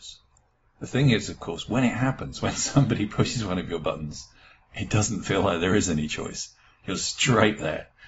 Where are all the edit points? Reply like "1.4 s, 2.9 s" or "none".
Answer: none